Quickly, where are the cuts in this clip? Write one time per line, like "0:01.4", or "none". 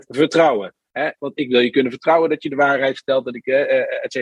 none

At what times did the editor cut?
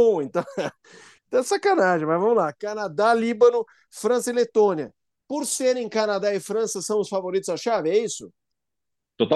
none

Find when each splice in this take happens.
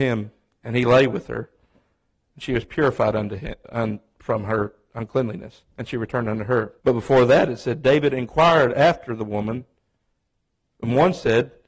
0:05.7
0:06.8

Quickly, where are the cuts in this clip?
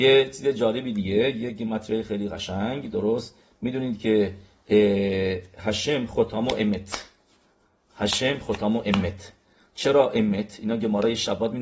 none

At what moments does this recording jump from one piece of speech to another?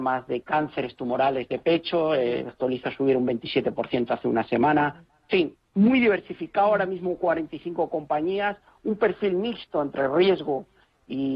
none

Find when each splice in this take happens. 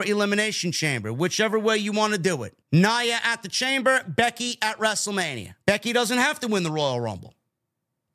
0:02.6
0:05.6

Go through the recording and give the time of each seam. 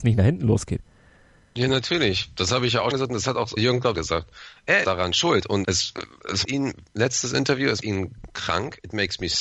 0:02.9
0:03.6
0:03.9
0:04.8
0:05.6
0:06.4
0:07.8

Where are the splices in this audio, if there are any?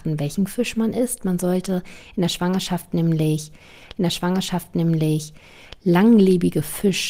0:04.0

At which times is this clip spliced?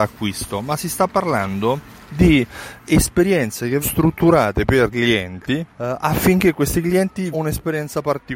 0:03.8
0:04.9
0:05.7
0:07.3

